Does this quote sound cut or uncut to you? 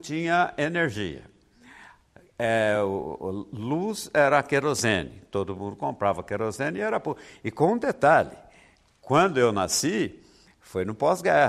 uncut